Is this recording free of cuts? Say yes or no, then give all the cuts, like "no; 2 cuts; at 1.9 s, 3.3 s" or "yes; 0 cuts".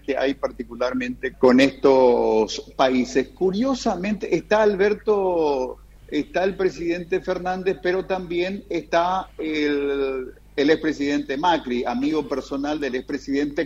no; 1 cut; at 1.3 s